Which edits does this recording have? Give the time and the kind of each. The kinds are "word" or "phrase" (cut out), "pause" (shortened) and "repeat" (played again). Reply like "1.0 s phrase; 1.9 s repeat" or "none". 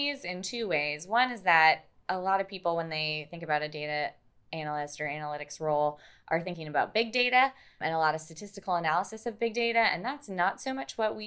none